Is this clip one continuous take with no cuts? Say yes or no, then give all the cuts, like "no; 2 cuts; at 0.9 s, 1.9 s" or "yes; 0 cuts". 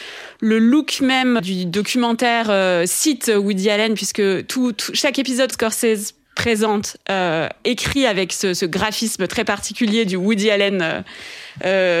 no; 2 cuts; at 1.4 s, 5.5 s